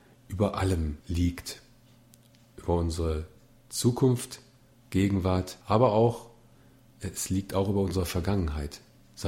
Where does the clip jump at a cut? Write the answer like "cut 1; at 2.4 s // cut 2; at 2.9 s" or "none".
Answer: cut 1; at 1.0 s // cut 2; at 5.6 s